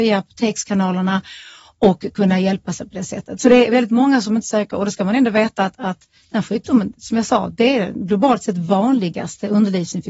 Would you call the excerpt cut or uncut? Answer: uncut